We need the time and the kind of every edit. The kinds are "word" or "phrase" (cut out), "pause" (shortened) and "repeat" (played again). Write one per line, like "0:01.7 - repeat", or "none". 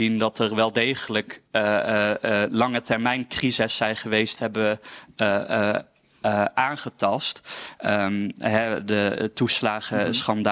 0:04.3 - phrase